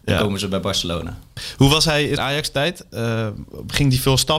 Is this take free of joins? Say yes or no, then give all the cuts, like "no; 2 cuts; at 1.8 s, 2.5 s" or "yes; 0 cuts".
no; 1 cut; at 2.2 s